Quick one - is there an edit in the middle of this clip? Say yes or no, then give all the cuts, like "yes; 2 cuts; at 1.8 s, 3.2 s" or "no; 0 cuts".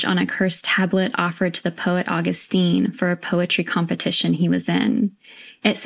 no; 0 cuts